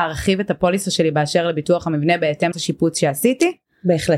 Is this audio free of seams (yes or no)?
no